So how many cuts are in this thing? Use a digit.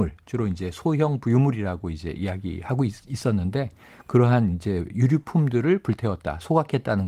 0